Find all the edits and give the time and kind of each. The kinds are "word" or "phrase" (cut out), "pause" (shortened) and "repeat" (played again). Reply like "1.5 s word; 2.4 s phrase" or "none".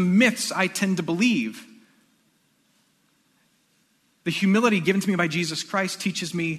none